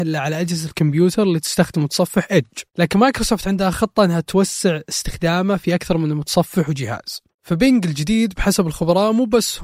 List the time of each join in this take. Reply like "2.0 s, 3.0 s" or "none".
2.7 s, 7.3 s